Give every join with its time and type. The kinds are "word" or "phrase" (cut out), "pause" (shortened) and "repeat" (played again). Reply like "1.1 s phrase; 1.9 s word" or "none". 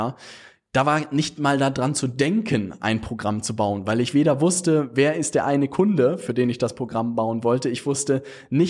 none